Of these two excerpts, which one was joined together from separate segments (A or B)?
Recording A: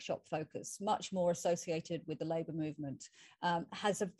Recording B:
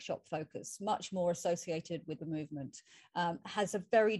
B